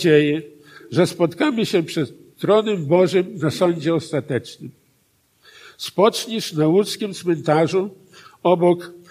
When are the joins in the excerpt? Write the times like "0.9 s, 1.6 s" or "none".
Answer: none